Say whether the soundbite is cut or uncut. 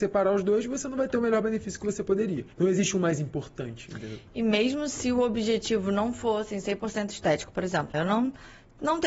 cut